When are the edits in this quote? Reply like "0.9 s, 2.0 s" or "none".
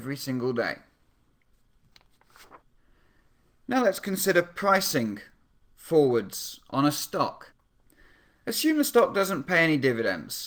none